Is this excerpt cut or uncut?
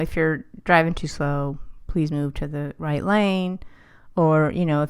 uncut